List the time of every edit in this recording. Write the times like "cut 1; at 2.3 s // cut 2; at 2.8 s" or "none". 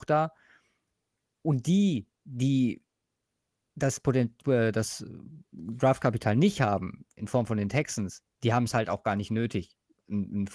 cut 1; at 2.1 s